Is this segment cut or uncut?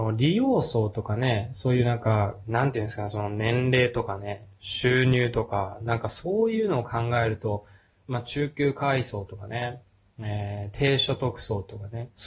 uncut